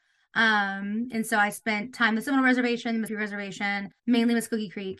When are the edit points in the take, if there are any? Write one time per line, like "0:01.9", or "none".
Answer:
0:03.1
0:04.0